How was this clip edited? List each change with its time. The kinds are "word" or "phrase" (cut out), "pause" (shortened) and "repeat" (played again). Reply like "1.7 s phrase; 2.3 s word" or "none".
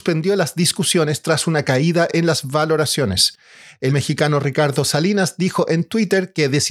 3.9 s word